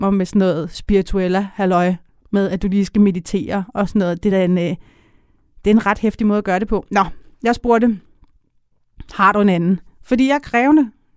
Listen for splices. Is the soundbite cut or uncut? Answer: uncut